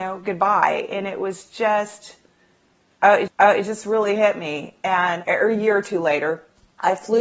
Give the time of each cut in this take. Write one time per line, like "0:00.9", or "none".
0:03.3